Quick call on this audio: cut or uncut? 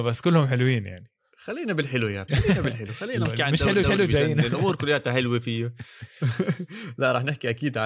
cut